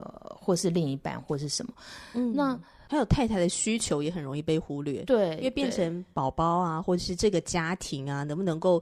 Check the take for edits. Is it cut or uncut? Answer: uncut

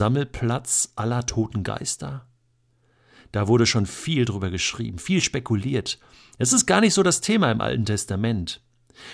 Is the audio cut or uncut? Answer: uncut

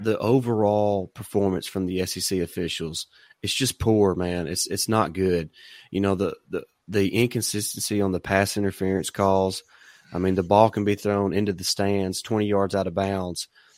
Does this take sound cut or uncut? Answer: uncut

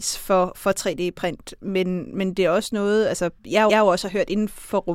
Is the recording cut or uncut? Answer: cut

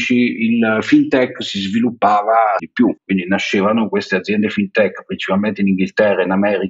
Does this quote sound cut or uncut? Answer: cut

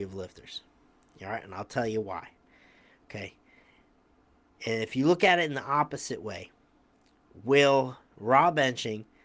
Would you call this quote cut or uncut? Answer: uncut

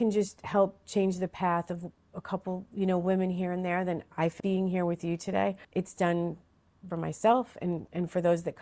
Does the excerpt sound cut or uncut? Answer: cut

